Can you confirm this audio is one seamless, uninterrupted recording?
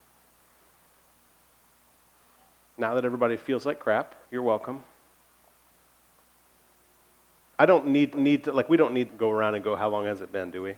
no; 3 cuts; at 4.2 s, 8.1 s, 9.1 s

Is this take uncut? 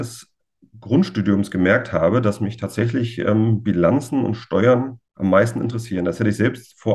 no; 1 cut; at 5.1 s

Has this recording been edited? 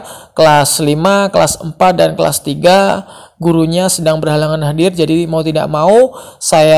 no; 0 cuts

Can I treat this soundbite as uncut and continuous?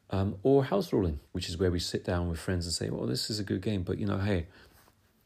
no; 1 cut; at 1.3 s

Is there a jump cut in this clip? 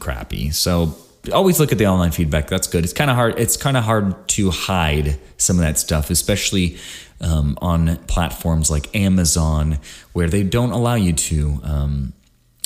no; 0 cuts

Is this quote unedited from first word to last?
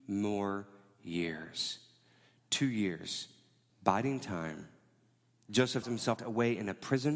no; 3 cuts; at 3.7 s, 5.8 s, 6.2 s

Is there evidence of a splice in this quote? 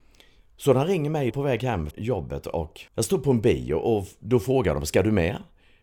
yes; 3 cuts; at 1.3 s, 1.9 s, 2.9 s

